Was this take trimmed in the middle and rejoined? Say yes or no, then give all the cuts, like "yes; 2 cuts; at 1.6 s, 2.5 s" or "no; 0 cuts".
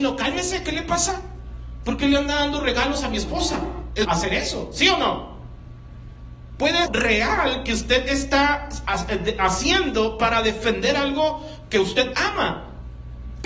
yes; 2 cuts; at 4.0 s, 6.9 s